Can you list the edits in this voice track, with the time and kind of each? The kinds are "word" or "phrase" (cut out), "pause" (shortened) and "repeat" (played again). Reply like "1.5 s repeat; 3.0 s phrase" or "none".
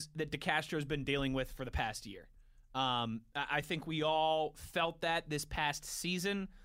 none